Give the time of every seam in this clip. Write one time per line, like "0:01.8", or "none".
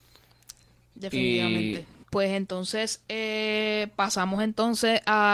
0:02.0